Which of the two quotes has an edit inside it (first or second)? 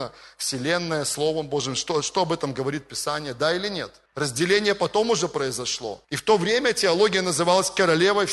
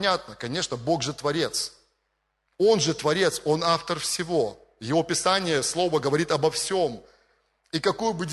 first